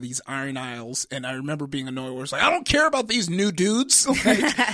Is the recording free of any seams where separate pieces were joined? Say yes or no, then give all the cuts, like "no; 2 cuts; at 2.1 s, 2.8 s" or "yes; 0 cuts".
yes; 0 cuts